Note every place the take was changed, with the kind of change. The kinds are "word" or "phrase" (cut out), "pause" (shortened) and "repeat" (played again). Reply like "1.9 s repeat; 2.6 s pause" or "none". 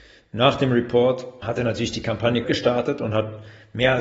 1.4 s word; 2.4 s word